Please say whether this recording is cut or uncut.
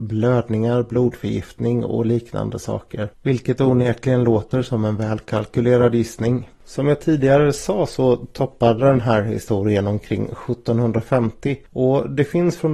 cut